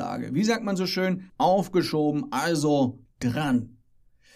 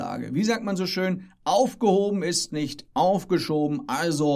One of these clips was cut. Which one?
first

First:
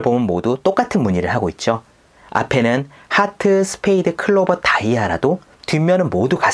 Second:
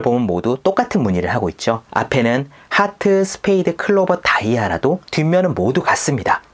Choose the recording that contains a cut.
second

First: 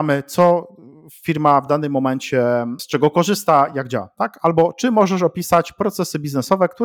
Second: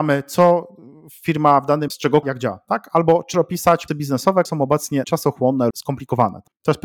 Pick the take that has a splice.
second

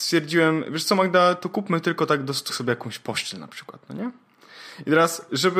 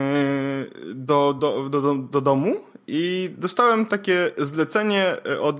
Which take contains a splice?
first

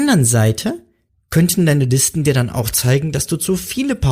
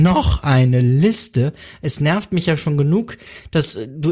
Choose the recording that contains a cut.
first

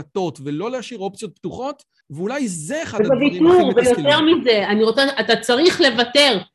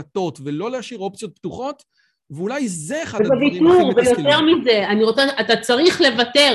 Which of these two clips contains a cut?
first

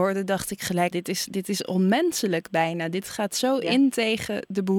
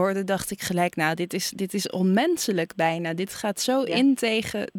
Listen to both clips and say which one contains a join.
first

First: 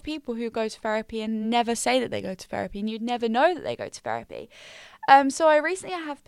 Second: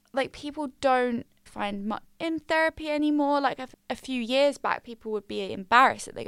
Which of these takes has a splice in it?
second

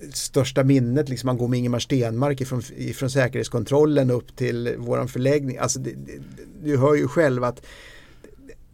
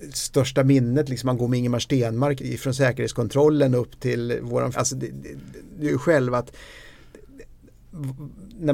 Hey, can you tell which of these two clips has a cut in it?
second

